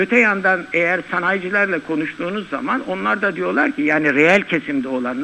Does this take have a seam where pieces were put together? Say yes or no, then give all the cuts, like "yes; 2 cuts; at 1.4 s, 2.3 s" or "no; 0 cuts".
no; 0 cuts